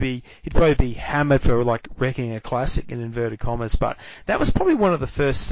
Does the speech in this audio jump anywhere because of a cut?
no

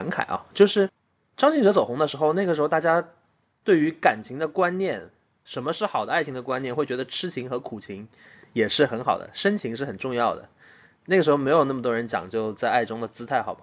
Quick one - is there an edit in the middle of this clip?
no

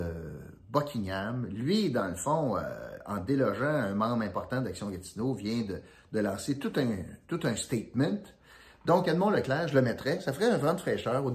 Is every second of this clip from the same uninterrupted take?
yes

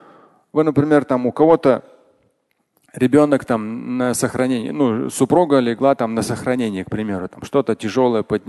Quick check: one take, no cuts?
yes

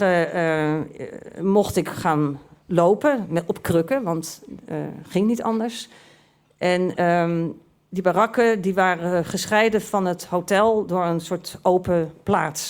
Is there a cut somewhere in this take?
no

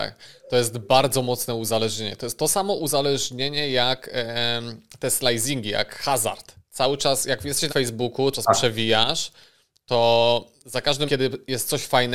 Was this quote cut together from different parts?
yes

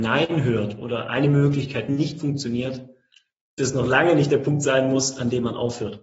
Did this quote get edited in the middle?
no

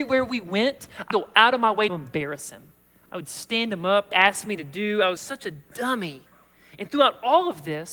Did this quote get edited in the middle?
yes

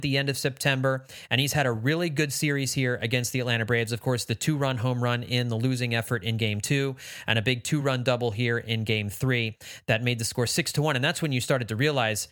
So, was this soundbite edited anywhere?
no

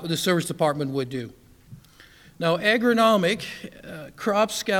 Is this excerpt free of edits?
yes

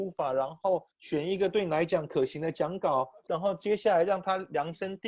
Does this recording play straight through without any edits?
no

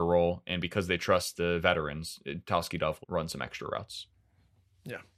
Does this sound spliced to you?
yes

